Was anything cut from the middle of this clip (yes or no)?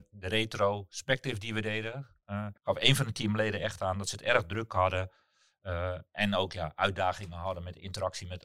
yes